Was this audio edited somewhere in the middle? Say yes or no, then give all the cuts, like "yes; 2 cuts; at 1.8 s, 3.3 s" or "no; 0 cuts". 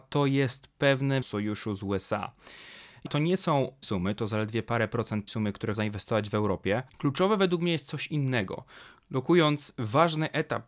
yes; 6 cuts; at 1.2 s, 3.1 s, 3.8 s, 5.3 s, 5.7 s, 6.9 s